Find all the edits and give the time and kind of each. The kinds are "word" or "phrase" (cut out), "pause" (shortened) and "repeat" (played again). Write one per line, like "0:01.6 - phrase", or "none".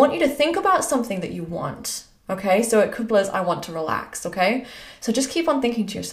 0:03.1 - phrase